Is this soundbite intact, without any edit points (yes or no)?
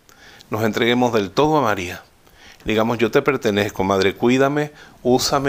yes